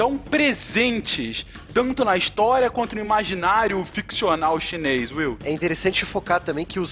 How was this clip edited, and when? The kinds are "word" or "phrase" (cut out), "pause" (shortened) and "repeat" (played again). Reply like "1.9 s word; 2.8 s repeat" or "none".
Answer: none